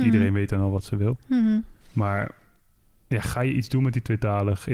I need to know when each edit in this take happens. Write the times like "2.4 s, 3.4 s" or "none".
1.8 s